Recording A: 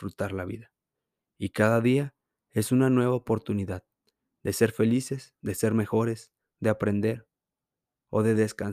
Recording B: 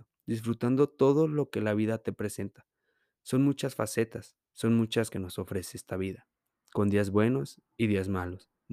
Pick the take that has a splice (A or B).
B